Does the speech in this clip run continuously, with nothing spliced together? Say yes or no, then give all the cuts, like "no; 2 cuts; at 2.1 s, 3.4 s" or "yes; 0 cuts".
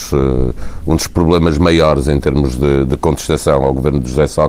yes; 0 cuts